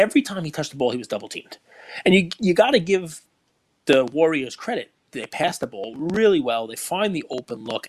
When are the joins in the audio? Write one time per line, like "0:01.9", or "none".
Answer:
none